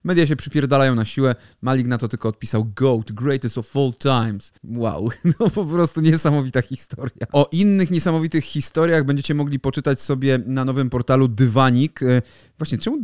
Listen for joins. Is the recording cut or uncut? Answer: cut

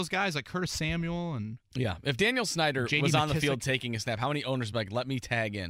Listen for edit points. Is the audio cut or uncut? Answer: uncut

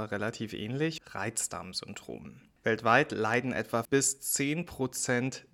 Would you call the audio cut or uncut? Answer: cut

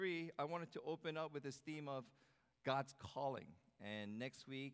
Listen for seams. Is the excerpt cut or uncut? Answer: uncut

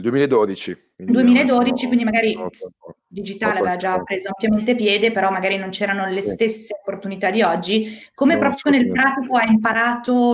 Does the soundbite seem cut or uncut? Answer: cut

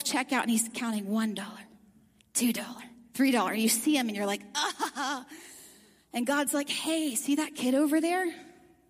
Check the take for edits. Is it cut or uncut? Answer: uncut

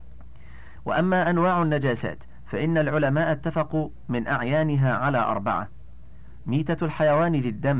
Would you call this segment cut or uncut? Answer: uncut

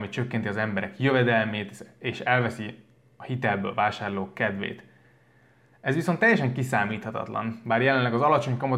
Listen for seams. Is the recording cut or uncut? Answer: uncut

